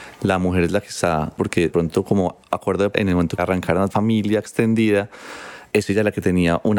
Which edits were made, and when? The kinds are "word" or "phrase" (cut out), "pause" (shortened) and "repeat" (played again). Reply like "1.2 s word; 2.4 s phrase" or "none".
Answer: 1.4 s word; 1.7 s word; 2.9 s word; 3.4 s word; 3.9 s word; 5.7 s word